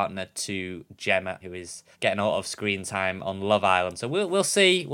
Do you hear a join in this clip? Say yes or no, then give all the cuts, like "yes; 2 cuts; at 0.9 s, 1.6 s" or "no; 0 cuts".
yes; 2 cuts; at 1.4 s, 1.9 s